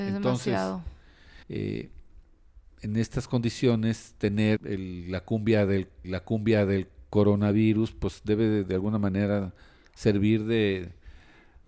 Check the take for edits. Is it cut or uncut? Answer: cut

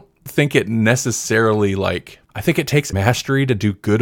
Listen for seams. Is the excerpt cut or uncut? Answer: cut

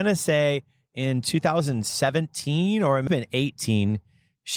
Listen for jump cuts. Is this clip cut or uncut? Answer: cut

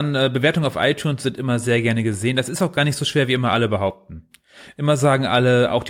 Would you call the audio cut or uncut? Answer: uncut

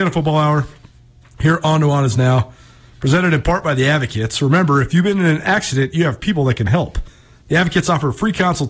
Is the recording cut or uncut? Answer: uncut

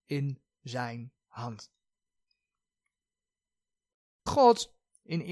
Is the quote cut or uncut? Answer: cut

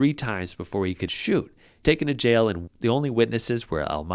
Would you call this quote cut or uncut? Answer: cut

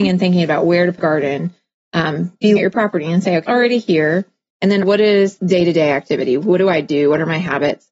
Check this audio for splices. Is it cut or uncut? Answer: cut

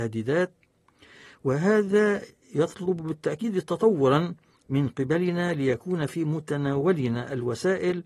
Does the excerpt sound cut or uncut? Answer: uncut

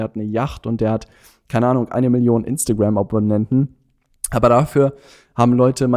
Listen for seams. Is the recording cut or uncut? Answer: uncut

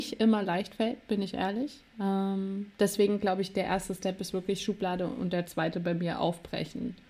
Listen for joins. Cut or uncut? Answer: uncut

